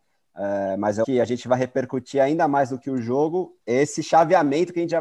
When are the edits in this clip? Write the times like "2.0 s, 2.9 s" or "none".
1.0 s, 3.6 s